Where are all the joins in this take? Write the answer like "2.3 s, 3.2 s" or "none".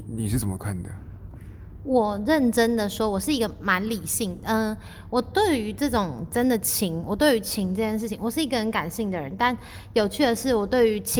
none